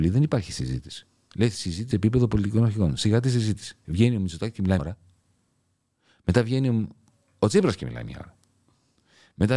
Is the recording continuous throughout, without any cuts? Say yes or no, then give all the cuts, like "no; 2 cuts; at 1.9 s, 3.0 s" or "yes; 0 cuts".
no; 2 cuts; at 1.9 s, 4.8 s